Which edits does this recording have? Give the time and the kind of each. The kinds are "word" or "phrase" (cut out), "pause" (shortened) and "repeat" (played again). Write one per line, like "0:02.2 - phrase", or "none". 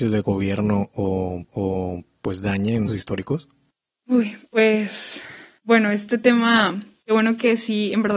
0:01.5 - repeat
0:02.9 - word

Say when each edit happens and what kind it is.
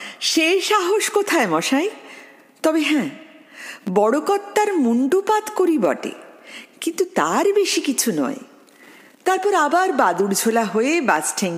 none

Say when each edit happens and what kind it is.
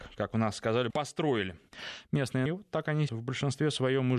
0:00.9 - word
0:02.5 - word
0:03.1 - word

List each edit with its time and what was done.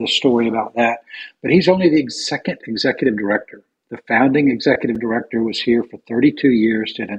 none

